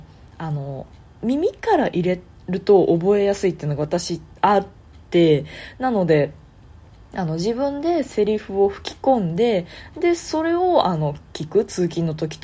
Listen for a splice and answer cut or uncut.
uncut